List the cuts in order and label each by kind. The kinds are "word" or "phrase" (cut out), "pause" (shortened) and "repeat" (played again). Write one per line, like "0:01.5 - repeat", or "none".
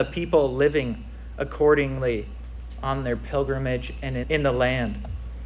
0:04.2 - word